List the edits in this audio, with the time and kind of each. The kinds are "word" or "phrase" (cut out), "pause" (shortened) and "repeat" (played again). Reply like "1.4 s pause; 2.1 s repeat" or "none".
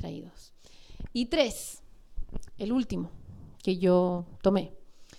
none